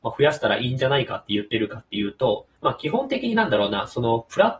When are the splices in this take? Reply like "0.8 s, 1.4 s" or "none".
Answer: 2.5 s